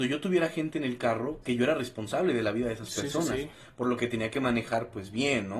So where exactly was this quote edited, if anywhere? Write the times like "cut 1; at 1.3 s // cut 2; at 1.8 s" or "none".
cut 1; at 1.4 s

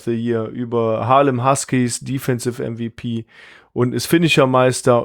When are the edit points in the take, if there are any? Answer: none

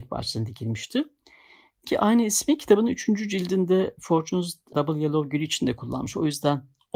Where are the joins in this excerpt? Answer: cut 1; at 1.8 s // cut 2; at 4.7 s

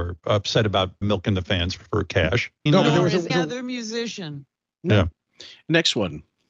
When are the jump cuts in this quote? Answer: cut 1; at 1.0 s // cut 2; at 1.8 s // cut 3; at 2.7 s // cut 4; at 3.3 s

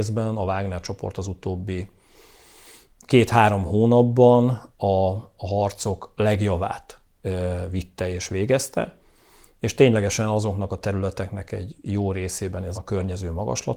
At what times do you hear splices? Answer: cut 1; at 12.7 s

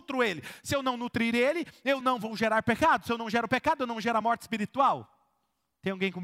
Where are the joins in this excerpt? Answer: none

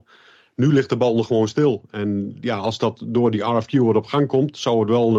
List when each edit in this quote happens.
none

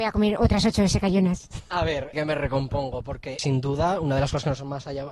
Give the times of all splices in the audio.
cut 1; at 2.1 s // cut 2; at 3.4 s

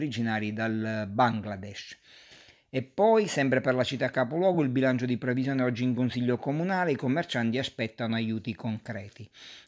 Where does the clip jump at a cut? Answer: none

